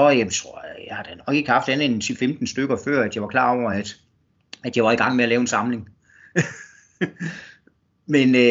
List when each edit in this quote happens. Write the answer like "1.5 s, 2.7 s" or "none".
none

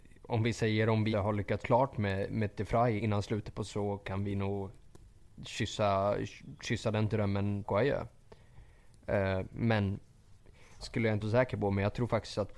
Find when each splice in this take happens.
1.1 s, 1.6 s, 3.0 s, 3.7 s, 7.6 s, 10.8 s, 11.2 s

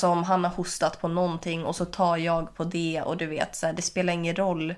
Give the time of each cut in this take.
none

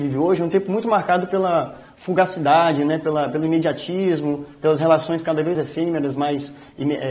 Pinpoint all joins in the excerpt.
5.5 s

